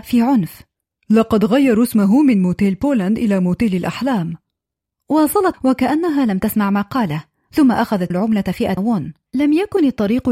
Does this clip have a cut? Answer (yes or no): yes